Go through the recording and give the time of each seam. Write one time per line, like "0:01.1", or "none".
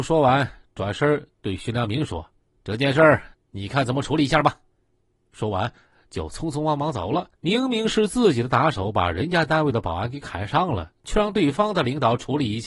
0:02.4
0:03.3
0:07.3

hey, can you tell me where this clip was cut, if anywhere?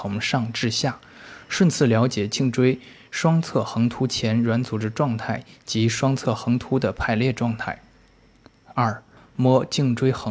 0:09.2

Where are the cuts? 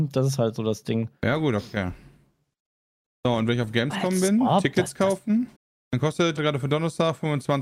0:05.6
0:06.4

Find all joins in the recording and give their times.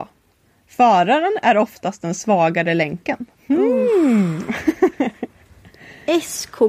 0:03.3

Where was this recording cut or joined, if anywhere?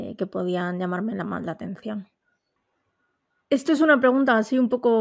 none

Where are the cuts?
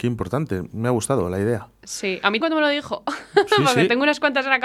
0:02.4

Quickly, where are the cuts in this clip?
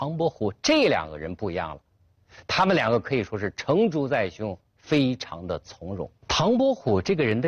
0:04.7
0:06.2

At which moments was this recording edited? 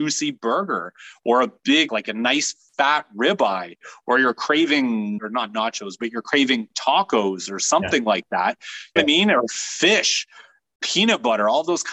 0:01.9
0:05.2
0:09.0

